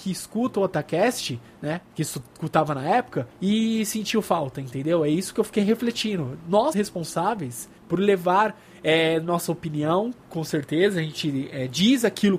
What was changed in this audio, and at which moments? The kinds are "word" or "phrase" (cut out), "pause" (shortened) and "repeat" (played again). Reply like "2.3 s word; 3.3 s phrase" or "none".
1.9 s pause; 3.3 s pause; 6.7 s word; 7.8 s pause